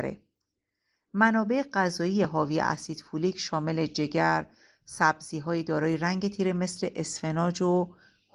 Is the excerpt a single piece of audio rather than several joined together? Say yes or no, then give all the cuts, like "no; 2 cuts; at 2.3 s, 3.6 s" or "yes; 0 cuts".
yes; 0 cuts